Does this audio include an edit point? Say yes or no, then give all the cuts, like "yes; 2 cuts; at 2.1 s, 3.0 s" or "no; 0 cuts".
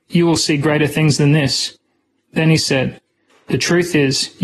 no; 0 cuts